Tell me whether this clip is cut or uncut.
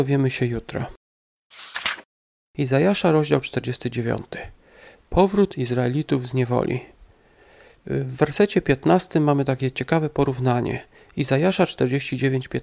uncut